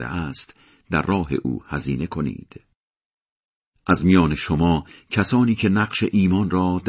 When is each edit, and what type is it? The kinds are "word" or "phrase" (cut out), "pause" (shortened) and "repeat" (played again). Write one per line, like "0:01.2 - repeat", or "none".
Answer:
none